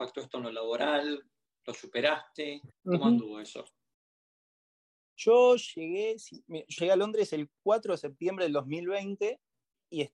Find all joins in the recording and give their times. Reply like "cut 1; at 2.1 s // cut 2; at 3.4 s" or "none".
cut 1; at 2.7 s // cut 2; at 6.8 s

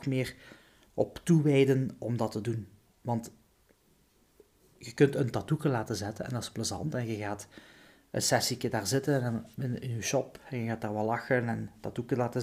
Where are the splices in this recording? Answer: none

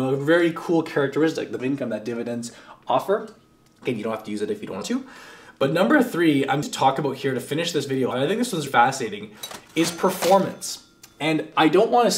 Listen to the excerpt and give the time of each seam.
cut 1; at 1.6 s // cut 2; at 4.8 s // cut 3; at 6.6 s // cut 4; at 8.1 s // cut 5; at 8.7 s

